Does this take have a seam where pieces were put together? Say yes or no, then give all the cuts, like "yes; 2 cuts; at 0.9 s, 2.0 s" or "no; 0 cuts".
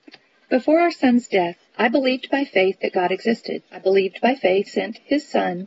yes; 3 cuts; at 1.7 s, 3.7 s, 4.7 s